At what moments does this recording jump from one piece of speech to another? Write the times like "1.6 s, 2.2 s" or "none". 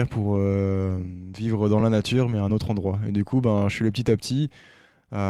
none